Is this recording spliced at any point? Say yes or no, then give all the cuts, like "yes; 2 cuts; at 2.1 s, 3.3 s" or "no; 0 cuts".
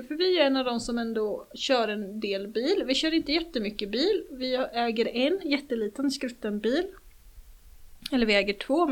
no; 0 cuts